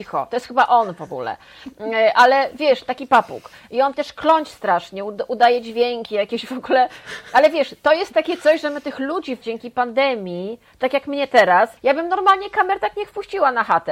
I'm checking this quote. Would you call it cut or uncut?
cut